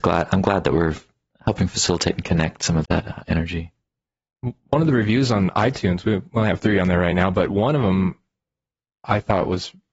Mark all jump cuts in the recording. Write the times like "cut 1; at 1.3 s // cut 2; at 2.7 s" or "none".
cut 1; at 2.8 s